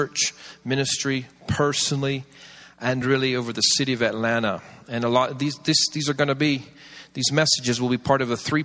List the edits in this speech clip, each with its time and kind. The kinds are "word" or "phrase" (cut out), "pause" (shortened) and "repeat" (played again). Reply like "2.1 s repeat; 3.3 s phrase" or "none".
none